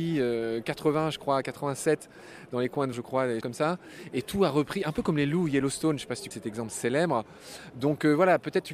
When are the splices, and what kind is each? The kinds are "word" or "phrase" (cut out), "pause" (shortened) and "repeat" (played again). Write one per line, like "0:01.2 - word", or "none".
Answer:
0:02.9 - word
0:03.4 - word
0:06.3 - word